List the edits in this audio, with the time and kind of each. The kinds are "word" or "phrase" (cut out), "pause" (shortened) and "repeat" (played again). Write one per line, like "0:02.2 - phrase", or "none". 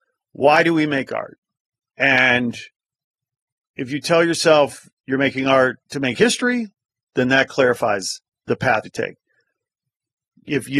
0:05.8 - pause
0:06.9 - pause
0:08.8 - phrase